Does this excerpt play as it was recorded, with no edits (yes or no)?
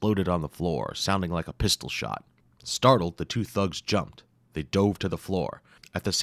yes